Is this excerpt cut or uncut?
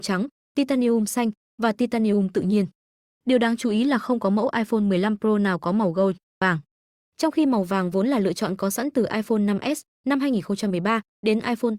uncut